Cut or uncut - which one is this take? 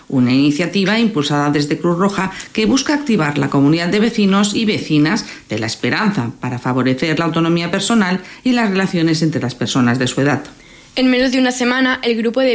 uncut